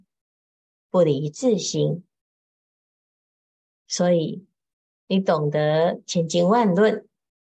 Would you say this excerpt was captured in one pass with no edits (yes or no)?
yes